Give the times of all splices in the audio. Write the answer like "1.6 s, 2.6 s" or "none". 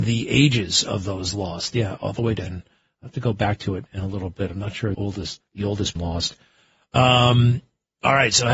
2.5 s, 4.9 s, 5.4 s, 6.0 s